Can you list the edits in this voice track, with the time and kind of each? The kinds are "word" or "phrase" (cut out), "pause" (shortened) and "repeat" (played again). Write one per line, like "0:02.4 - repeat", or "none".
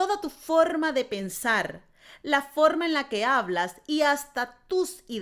none